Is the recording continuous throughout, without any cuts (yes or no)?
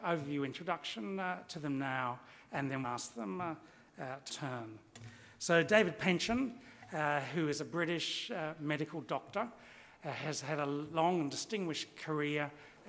no